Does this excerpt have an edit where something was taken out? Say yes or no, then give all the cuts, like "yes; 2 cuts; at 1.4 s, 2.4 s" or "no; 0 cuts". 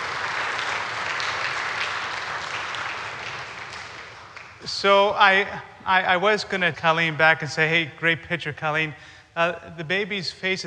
yes; 1 cut; at 6.7 s